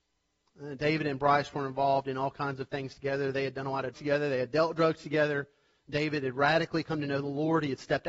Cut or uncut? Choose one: cut